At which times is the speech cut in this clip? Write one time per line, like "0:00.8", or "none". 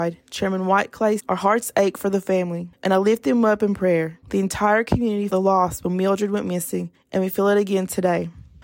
0:01.2
0:05.3